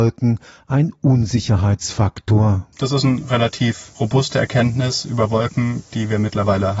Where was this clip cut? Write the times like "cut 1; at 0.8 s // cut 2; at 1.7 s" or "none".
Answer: none